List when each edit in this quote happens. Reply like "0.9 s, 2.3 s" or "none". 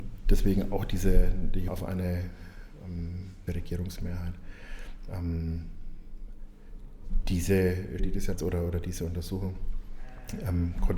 1.7 s, 3.5 s, 8.0 s, 8.3 s